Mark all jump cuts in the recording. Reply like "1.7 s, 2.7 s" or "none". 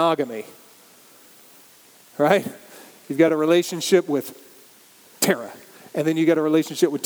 none